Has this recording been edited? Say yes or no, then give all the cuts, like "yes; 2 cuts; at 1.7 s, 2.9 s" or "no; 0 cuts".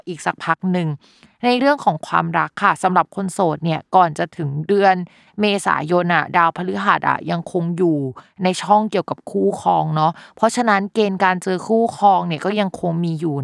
no; 0 cuts